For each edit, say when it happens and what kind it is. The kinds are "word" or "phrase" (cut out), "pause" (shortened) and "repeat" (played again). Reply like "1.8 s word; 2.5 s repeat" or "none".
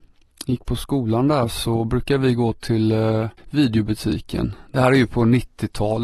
3.4 s pause